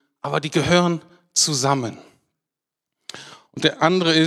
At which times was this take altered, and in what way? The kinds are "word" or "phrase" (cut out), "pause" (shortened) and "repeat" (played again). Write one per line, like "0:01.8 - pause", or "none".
none